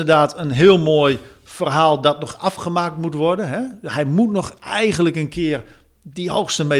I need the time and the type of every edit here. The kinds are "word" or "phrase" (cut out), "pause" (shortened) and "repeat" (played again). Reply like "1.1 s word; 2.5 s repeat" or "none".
none